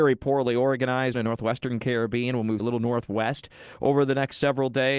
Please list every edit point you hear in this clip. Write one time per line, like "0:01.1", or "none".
0:01.1
0:02.6